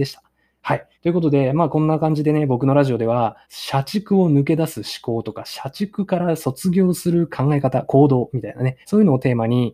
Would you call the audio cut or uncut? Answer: cut